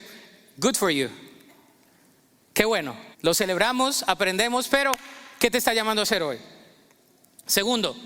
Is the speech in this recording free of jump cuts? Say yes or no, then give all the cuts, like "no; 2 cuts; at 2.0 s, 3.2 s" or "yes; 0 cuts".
no; 1 cut; at 3.1 s